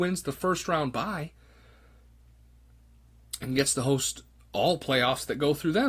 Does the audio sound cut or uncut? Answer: uncut